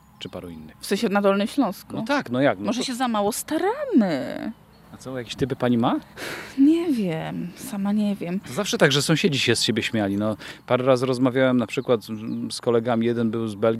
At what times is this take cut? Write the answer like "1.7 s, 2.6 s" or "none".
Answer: none

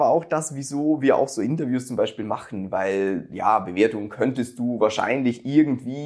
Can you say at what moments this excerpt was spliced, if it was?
none

